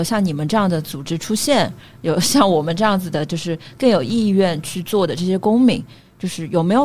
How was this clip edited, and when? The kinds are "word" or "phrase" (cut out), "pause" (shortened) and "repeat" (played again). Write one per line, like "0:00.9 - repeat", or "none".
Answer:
none